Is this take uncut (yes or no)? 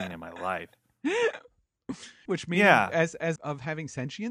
no